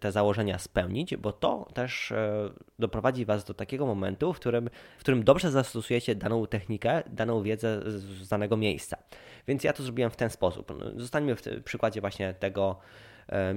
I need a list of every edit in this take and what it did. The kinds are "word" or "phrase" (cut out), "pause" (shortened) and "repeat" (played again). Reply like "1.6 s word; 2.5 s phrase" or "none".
none